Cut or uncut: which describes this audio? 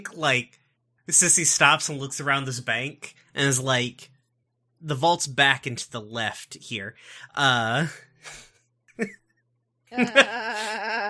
uncut